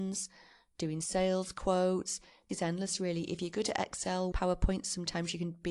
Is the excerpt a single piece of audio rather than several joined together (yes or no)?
no